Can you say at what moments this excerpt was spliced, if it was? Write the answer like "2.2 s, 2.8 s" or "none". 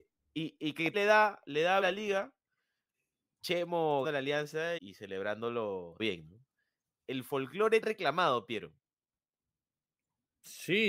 0.9 s, 1.8 s, 4.0 s, 4.8 s, 6.0 s, 7.8 s